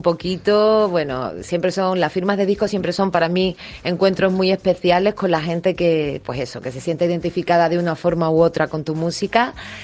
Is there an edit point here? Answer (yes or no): no